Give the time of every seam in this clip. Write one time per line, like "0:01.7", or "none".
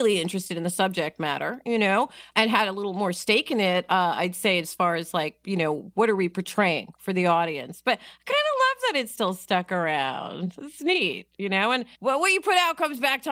0:11.9